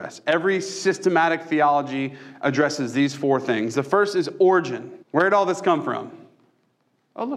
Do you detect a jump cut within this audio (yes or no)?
yes